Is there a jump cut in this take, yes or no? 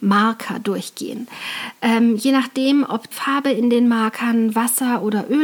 yes